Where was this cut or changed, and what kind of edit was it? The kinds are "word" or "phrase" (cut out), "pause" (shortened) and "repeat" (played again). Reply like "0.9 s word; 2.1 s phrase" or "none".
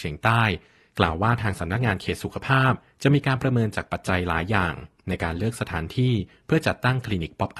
none